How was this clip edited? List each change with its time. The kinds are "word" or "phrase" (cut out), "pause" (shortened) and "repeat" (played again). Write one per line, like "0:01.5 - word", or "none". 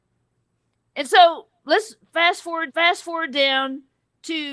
0:02.7 - repeat